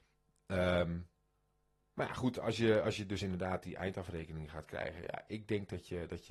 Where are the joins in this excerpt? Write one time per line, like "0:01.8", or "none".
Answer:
none